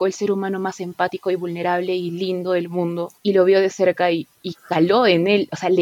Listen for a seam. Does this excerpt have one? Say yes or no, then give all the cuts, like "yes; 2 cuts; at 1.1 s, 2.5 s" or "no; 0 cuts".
yes; 1 cut; at 3.2 s